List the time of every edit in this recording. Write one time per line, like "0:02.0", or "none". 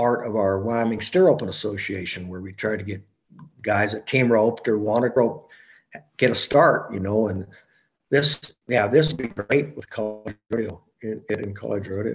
0:05.2
0:08.6